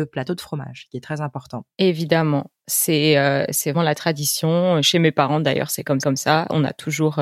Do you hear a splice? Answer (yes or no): yes